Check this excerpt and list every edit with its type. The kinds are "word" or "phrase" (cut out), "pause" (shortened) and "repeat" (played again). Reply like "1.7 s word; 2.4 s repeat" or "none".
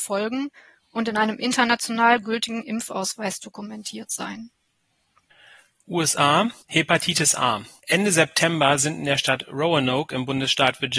6.6 s pause